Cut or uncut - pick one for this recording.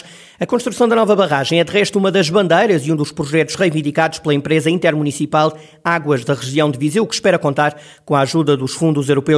uncut